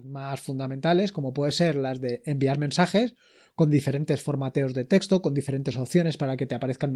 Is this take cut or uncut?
uncut